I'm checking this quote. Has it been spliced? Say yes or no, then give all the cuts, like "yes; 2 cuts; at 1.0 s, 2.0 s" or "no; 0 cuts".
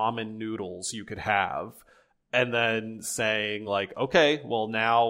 no; 0 cuts